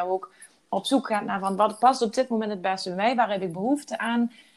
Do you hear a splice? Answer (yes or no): no